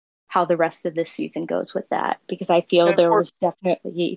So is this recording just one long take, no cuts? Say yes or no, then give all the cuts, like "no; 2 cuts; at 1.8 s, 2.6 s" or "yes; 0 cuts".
yes; 0 cuts